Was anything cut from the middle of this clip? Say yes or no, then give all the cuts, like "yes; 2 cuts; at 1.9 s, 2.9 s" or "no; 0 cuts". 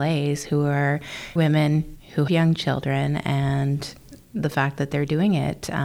yes; 2 cuts; at 1.4 s, 2.3 s